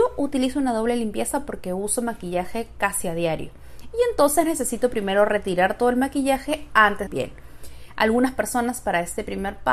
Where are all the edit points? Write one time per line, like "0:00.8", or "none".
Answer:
0:07.1